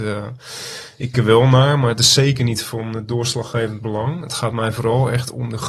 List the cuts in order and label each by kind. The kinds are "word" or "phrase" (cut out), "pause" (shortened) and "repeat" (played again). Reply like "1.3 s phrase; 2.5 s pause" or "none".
1.1 s word